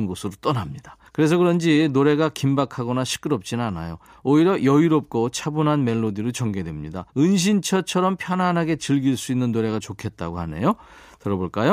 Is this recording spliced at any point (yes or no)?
yes